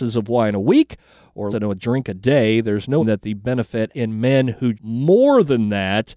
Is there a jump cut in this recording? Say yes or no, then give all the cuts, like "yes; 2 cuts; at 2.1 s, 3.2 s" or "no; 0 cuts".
yes; 4 cuts; at 1.5 s, 3.0 s, 3.9 s, 4.7 s